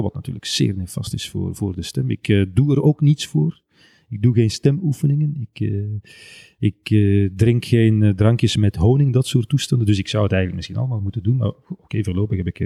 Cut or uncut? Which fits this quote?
uncut